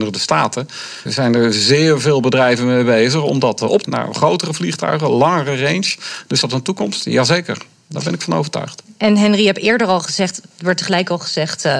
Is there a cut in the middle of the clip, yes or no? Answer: yes